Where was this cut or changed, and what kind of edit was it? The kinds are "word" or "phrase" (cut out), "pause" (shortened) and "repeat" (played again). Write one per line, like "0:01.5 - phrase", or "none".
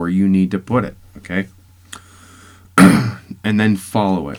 0:01.7 - pause